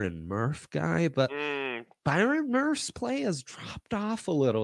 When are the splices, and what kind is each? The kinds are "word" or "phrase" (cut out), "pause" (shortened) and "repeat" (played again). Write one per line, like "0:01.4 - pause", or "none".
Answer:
none